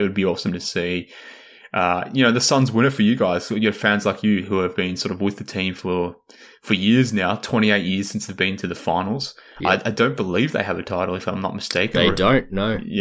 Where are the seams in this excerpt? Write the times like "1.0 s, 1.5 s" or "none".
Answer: none